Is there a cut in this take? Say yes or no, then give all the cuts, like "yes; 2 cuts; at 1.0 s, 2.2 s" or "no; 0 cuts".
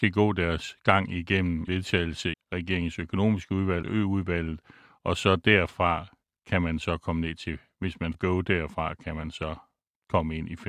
yes; 4 cuts; at 1.7 s, 2.3 s, 3.8 s, 8.1 s